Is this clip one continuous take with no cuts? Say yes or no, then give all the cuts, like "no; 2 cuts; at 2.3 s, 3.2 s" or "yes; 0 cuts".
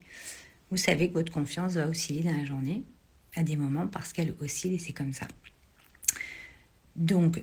yes; 0 cuts